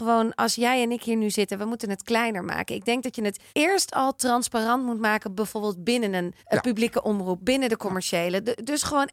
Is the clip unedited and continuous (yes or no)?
no